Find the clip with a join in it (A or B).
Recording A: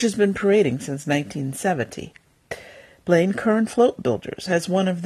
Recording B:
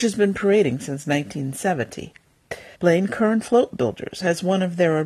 B